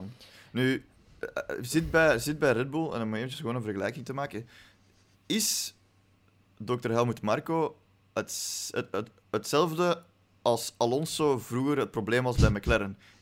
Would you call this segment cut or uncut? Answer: uncut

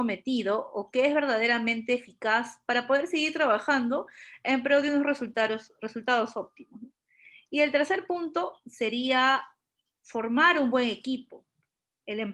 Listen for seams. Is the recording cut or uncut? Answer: uncut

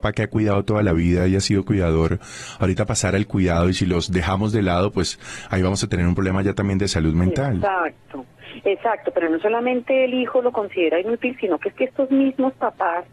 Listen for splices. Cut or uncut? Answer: uncut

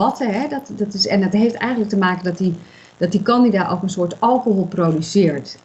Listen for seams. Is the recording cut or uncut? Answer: uncut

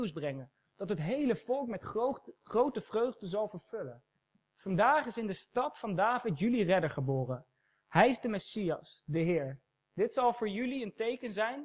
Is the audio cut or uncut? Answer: uncut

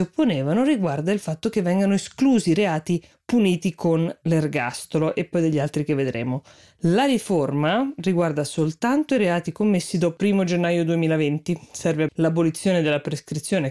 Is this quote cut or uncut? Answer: cut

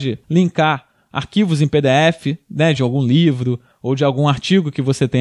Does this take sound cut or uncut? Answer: uncut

